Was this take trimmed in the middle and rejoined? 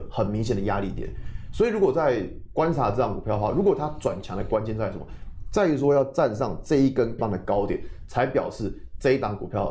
yes; 1 cut; at 7.2 s

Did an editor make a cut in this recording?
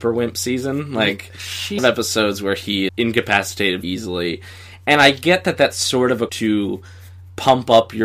yes; 4 cuts; at 1.8 s, 2.9 s, 3.8 s, 6.3 s

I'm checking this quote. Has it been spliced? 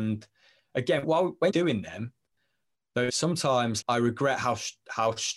yes; 4 cuts; at 1.0 s, 1.5 s, 3.1 s, 3.8 s

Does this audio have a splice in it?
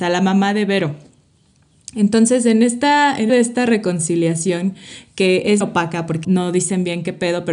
yes; 3 cuts; at 3.3 s, 5.6 s, 6.2 s

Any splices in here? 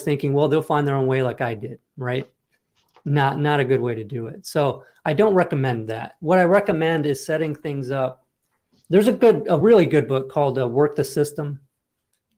no; 0 cuts

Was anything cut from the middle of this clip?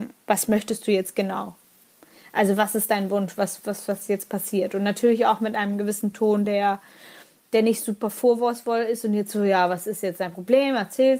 no; 0 cuts

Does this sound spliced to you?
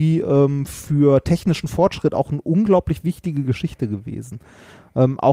no; 0 cuts

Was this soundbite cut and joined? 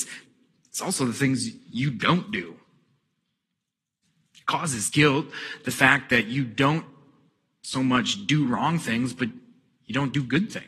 no; 0 cuts

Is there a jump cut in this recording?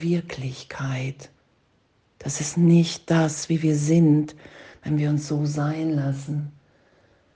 no; 0 cuts

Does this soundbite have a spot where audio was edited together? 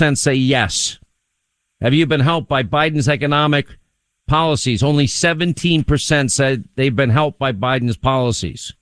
no; 0 cuts

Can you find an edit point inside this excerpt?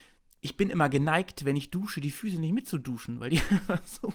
no; 0 cuts

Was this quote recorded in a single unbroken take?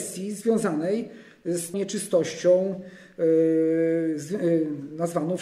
no; 1 cut; at 1.7 s

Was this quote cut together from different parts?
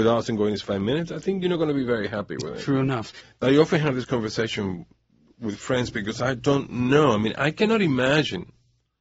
no; 0 cuts

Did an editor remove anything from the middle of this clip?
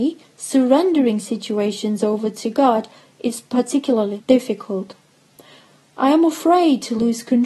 no; 0 cuts

